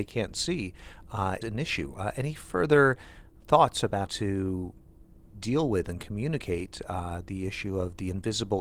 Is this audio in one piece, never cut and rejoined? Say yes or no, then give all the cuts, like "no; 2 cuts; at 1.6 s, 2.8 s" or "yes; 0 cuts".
no; 2 cuts; at 1.4 s, 4.1 s